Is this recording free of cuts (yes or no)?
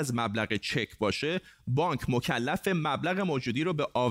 yes